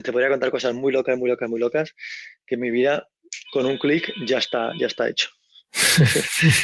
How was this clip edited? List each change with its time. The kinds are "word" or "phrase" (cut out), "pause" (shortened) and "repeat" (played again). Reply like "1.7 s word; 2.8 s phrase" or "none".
none